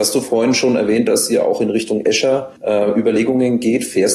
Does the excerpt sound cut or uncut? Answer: cut